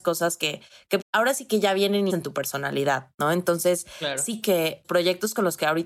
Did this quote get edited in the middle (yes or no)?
yes